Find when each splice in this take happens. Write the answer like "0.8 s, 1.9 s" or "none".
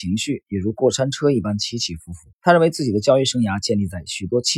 2.3 s